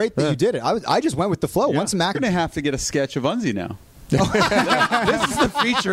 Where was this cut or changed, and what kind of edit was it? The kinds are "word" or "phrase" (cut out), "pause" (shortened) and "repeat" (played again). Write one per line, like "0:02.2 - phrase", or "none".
0:02.1 - word